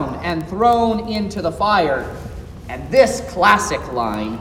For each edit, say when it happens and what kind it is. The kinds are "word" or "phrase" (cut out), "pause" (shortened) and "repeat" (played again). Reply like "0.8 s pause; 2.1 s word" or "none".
none